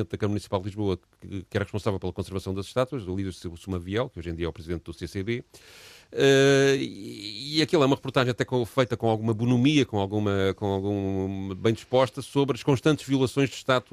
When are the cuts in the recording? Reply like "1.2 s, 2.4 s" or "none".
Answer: none